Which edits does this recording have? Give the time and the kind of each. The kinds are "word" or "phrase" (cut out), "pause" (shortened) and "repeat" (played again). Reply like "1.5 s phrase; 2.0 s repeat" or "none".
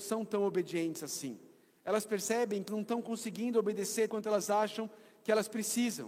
2.7 s word; 4.1 s word